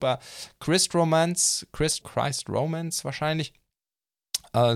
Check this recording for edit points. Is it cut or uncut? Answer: cut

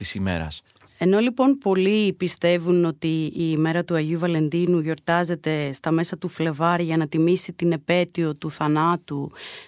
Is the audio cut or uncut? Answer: uncut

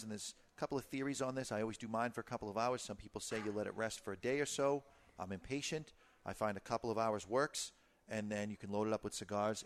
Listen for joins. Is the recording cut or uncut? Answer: uncut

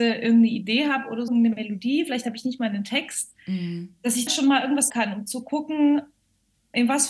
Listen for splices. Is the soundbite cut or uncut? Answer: cut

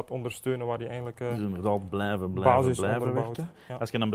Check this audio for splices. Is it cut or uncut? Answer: uncut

